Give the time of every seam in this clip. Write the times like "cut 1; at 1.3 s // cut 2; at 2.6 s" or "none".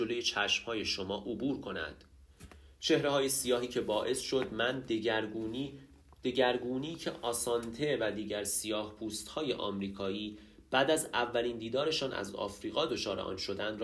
none